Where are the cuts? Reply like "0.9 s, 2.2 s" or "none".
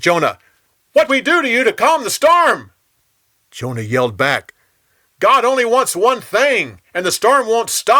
1.1 s